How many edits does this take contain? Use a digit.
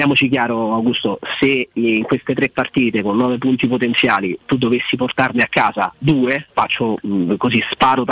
1